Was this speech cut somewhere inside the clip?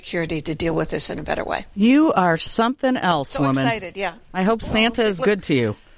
no; 0 cuts

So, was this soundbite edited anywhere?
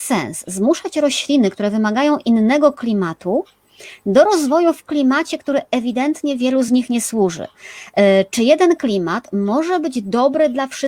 no; 0 cuts

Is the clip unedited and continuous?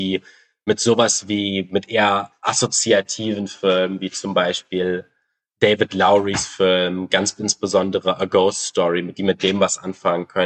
yes; 0 cuts

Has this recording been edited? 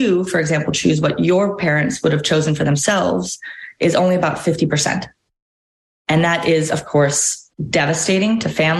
no; 0 cuts

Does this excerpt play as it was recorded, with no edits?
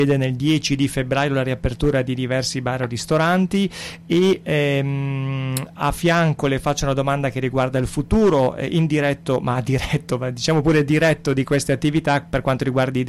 yes; 0 cuts

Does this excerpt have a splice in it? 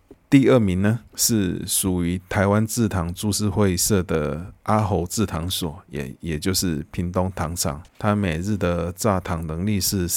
yes; 2 cuts; at 1.1 s, 7.9 s

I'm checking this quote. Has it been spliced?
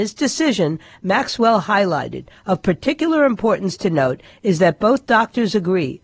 no; 0 cuts

